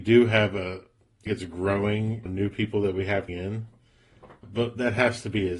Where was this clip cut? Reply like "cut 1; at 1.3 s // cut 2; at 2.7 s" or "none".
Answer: cut 1; at 1.3 s // cut 2; at 2.3 s // cut 3; at 3.3 s // cut 4; at 4.4 s